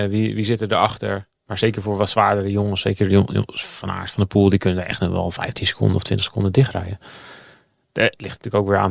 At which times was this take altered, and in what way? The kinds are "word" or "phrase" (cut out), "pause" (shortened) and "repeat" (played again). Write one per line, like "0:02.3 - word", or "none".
none